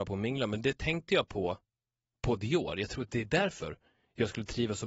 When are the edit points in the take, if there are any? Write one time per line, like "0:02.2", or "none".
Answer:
none

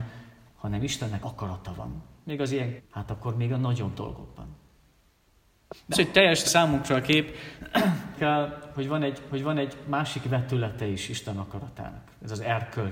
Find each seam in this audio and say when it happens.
0:01.2
0:02.8
0:05.9
0:06.4
0:08.2
0:09.3

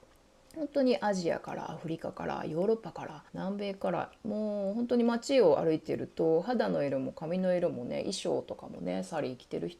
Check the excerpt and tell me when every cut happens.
0:03.3

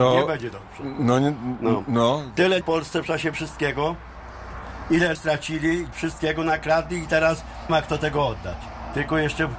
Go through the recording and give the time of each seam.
0:02.6
0:03.3
0:05.1
0:05.9
0:07.7

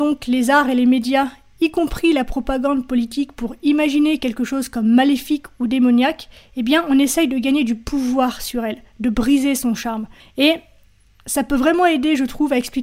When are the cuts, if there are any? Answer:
0:10.2

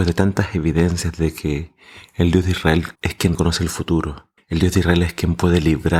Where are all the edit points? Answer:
0:02.9
0:03.3
0:04.4

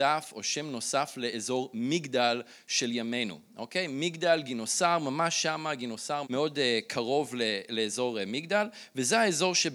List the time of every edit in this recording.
0:06.2

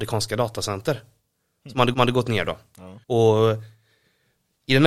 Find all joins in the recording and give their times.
0:01.9
0:03.0

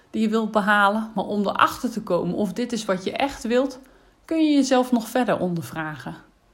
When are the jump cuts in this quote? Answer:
none

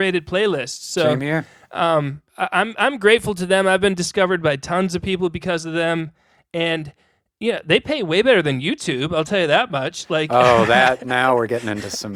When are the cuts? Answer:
none

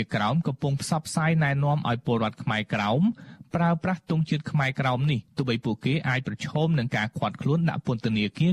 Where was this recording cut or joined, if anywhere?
0:05.3

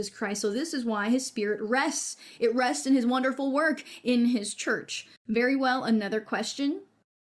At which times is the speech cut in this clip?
0:05.2

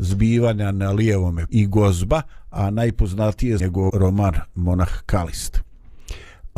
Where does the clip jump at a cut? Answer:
0:01.5
0:03.6
0:03.9

